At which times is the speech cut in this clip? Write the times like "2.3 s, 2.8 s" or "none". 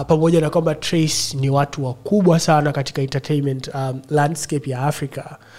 none